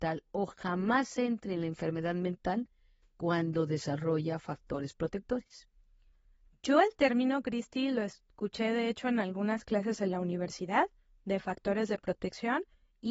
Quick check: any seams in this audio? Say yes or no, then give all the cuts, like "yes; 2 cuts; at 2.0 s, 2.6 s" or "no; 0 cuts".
no; 0 cuts